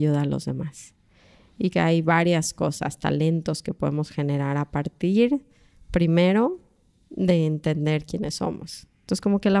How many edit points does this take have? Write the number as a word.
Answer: one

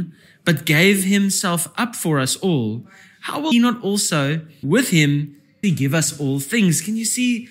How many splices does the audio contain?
three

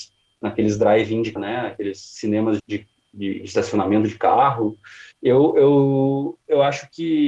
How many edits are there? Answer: three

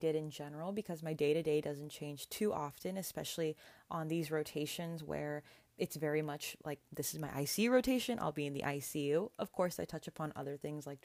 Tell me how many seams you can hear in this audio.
zero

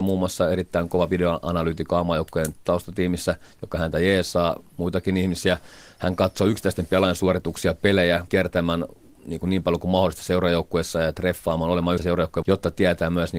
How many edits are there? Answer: three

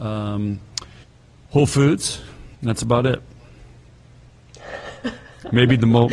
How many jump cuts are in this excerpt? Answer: two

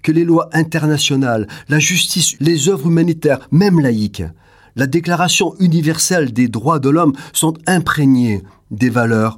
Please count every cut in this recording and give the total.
one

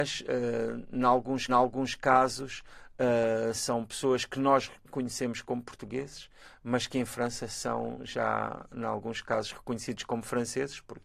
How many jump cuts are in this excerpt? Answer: one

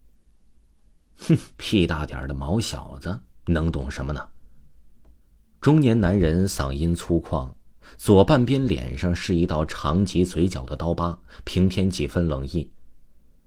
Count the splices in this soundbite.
one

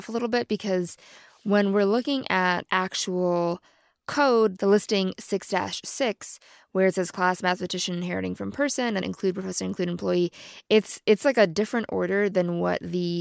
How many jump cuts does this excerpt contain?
two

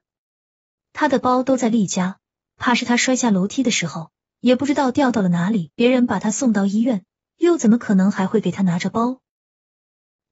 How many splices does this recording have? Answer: one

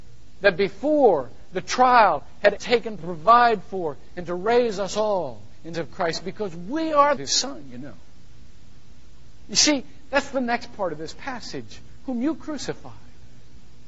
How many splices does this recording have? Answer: four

